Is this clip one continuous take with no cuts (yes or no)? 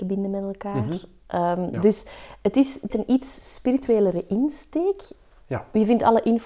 no